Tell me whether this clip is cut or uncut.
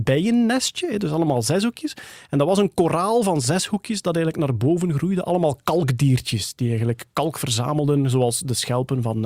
uncut